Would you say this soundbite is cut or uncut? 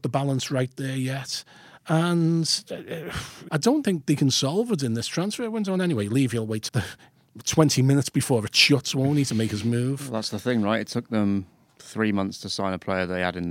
cut